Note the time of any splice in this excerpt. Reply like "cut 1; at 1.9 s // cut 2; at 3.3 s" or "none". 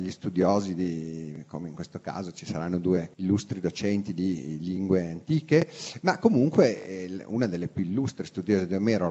cut 1; at 3.1 s